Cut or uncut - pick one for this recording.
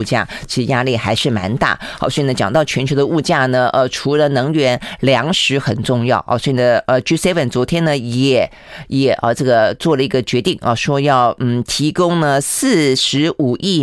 uncut